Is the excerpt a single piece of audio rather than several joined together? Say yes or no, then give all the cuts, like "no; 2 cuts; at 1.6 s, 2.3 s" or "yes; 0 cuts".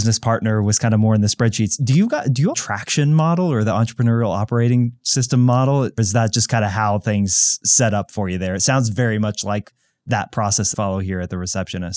no; 3 cuts; at 2.5 s, 6.0 s, 10.7 s